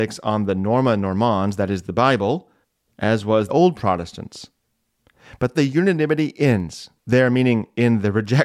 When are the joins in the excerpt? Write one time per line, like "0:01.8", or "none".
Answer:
0:02.6
0:03.5
0:05.5
0:07.0